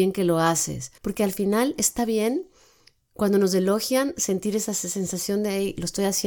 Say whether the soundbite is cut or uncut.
cut